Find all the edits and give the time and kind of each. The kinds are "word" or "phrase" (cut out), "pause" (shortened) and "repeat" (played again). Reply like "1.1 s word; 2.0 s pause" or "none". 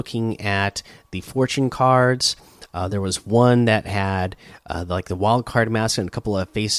none